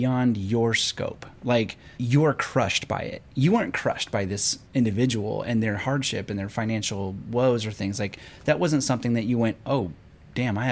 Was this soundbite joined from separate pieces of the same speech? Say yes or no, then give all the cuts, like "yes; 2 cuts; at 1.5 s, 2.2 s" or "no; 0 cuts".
yes; 2 cuts; at 1.9 s, 4.6 s